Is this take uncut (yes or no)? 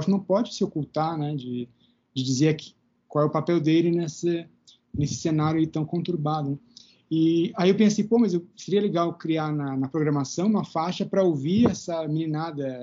yes